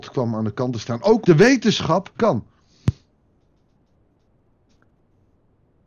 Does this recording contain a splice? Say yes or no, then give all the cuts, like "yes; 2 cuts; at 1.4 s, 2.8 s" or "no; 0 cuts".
yes; 2 cuts; at 1.2 s, 2.2 s